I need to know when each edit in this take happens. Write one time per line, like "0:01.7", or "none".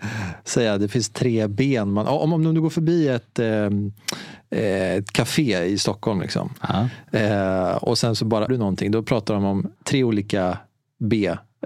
0:08.5
0:09.8